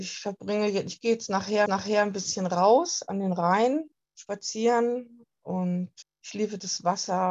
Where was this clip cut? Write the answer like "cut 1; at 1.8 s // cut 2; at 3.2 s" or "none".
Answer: cut 1; at 1.7 s // cut 2; at 4.0 s // cut 3; at 6.0 s